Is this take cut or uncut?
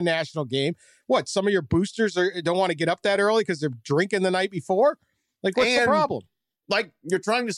uncut